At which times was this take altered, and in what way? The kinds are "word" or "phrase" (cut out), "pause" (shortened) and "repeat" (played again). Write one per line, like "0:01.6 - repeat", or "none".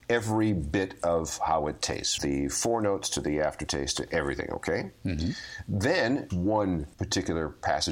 0:02.2 - word
0:06.3 - phrase
0:06.9 - pause